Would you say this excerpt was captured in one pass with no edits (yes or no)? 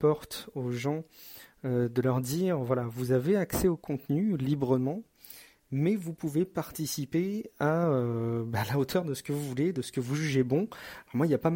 yes